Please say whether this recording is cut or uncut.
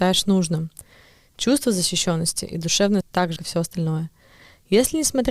cut